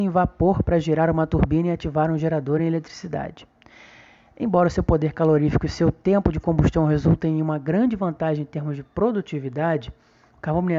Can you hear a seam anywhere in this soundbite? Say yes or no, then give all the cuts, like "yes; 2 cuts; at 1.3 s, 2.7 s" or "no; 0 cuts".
no; 0 cuts